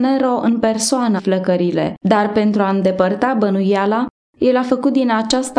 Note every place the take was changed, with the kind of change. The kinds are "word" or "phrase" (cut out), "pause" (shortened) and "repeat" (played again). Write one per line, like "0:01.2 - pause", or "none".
0:01.2 - phrase
0:02.0 - pause